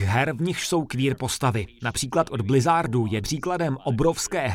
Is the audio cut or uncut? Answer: cut